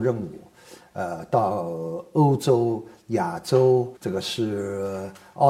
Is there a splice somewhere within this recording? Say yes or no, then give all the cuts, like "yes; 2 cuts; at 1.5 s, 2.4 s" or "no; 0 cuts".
yes; 1 cut; at 4.0 s